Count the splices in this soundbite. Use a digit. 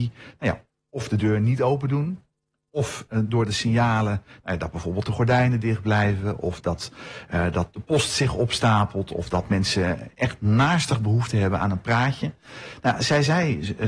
0